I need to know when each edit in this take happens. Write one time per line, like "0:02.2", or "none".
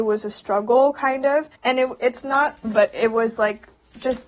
0:01.6
0:02.6